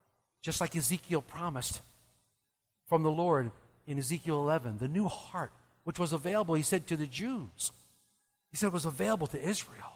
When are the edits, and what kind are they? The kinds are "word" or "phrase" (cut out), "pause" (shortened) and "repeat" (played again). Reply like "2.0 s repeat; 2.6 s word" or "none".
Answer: none